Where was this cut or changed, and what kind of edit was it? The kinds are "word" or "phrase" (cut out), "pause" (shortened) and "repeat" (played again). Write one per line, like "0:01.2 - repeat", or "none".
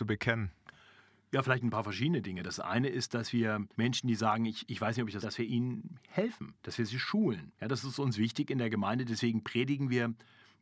0:03.7 - pause
0:05.2 - phrase
0:06.6 - pause
0:07.5 - pause